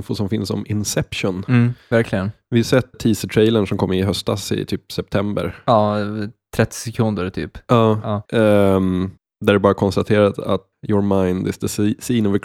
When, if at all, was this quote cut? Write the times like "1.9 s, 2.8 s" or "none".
2.9 s, 8.3 s, 9.2 s, 10.7 s